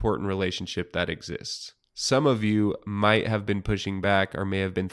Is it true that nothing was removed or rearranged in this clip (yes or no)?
yes